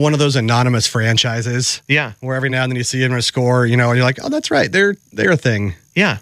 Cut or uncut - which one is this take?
uncut